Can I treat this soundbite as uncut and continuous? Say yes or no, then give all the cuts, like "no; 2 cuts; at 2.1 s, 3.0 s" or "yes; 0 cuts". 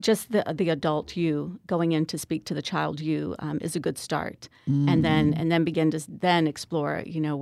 yes; 0 cuts